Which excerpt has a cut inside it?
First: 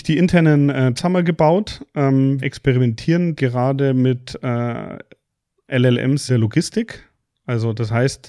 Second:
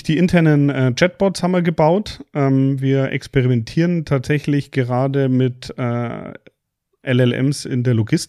first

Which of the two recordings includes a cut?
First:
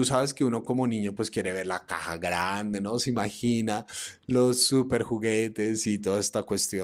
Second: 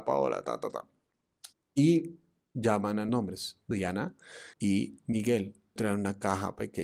second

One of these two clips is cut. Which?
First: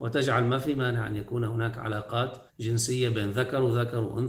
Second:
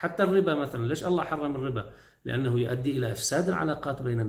first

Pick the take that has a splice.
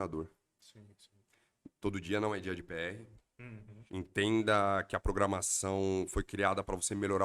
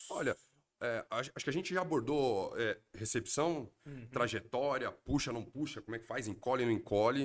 first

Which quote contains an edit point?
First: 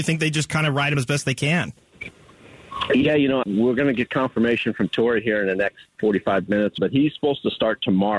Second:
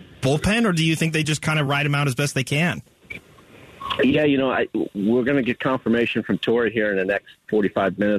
first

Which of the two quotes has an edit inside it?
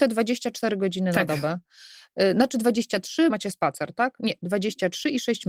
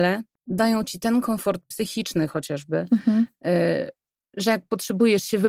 first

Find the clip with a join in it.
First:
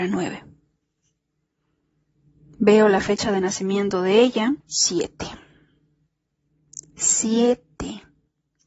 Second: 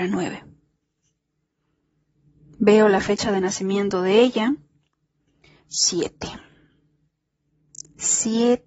first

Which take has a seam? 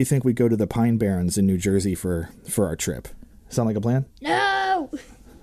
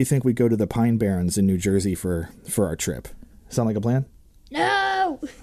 first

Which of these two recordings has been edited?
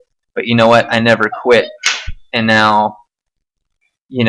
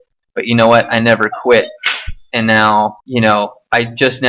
second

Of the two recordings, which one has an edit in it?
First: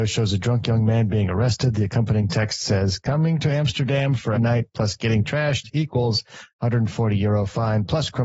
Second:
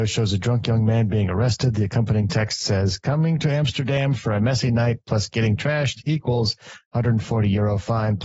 first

